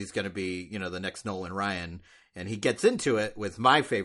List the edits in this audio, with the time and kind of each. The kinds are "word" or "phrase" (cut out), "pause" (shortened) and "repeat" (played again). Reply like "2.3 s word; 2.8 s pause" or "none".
none